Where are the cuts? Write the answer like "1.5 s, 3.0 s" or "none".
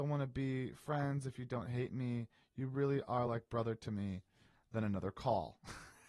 none